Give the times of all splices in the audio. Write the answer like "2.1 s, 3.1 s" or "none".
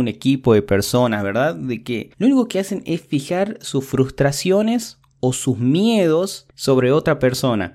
2.1 s, 6.5 s